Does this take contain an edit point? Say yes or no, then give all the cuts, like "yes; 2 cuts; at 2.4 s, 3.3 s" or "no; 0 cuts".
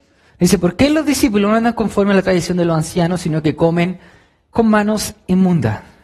no; 0 cuts